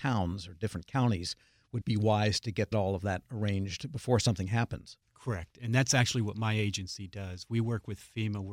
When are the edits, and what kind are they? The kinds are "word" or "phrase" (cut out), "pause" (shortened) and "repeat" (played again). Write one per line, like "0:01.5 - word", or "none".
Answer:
0:01.8 - word
0:02.7 - phrase
0:05.0 - pause